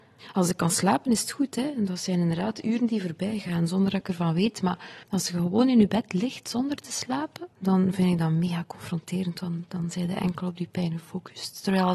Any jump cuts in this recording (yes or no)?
yes